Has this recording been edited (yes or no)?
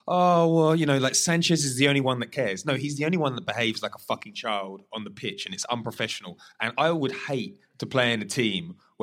no